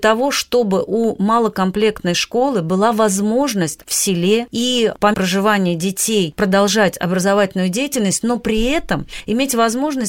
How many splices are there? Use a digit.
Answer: 2